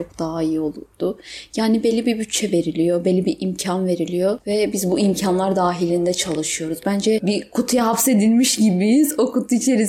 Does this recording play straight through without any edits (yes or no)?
yes